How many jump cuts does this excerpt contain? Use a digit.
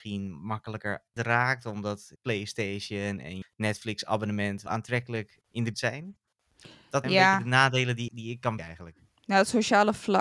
9